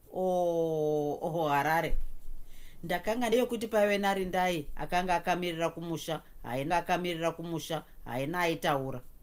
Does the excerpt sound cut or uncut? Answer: cut